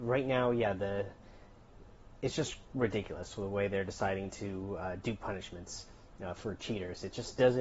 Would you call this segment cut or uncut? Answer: uncut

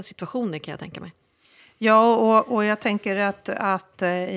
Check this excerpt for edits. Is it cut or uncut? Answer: uncut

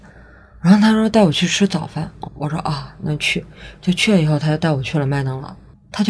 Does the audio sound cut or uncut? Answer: cut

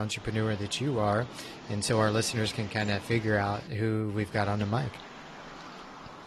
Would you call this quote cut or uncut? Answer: uncut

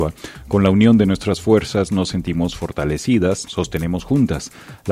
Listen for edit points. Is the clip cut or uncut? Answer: cut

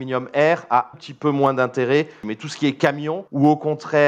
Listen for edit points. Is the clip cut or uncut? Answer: cut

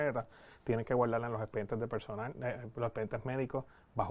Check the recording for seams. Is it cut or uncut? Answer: uncut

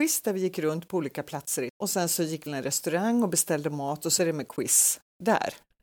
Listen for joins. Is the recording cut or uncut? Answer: cut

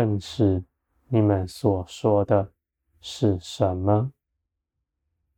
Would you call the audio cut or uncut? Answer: uncut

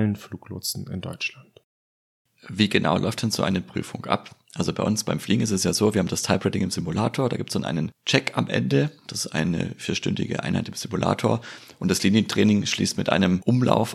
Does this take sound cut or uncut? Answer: uncut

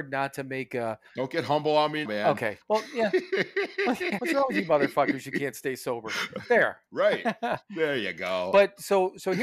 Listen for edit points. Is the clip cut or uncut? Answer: cut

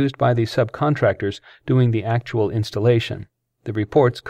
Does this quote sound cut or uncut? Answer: uncut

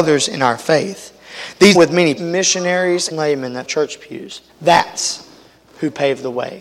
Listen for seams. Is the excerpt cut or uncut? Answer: cut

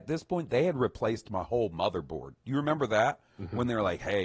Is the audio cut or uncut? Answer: cut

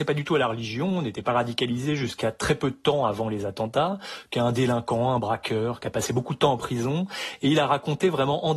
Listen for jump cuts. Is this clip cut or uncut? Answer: uncut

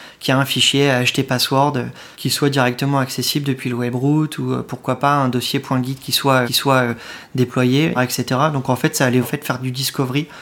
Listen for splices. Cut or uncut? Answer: cut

